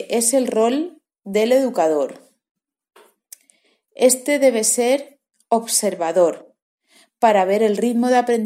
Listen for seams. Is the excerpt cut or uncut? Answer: uncut